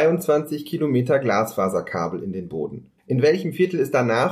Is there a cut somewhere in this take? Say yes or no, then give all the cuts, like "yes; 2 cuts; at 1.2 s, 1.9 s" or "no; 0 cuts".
yes; 1 cut; at 3.0 s